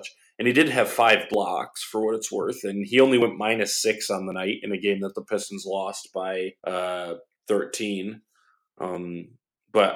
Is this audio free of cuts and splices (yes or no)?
no